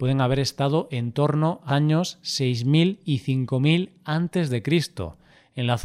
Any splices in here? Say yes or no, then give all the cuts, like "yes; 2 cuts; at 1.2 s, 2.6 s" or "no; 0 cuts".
yes; 1 cut; at 1.7 s